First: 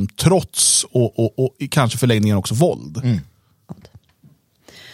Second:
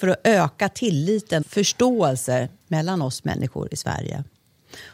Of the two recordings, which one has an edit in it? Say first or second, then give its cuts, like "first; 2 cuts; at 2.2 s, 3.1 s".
second; 1 cut; at 1.4 s